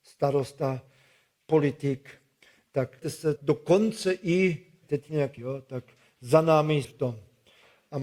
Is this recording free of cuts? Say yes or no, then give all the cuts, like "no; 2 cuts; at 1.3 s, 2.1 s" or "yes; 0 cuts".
no; 5 cuts; at 3.0 s, 3.4 s, 4.8 s, 5.4 s, 6.8 s